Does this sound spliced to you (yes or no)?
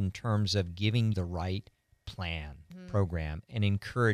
yes